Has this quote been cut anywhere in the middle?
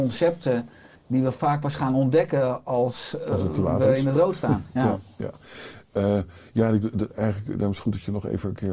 yes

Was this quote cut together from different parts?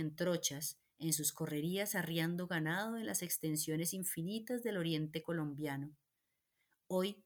no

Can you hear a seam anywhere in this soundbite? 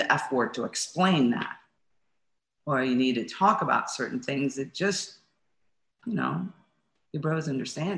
no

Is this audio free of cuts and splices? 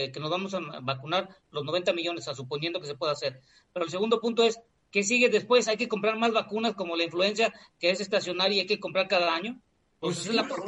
yes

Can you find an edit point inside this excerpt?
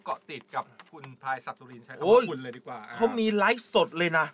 no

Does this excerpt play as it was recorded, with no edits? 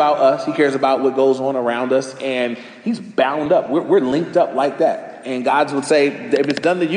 yes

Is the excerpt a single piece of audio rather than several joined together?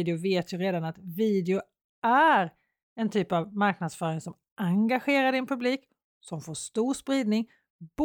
yes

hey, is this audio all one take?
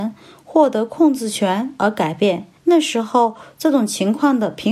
no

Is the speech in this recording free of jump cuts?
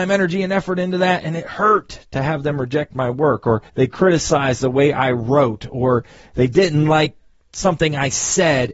no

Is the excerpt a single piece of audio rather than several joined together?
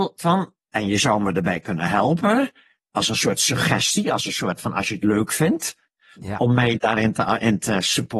yes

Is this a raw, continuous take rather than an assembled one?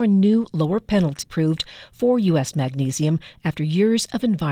no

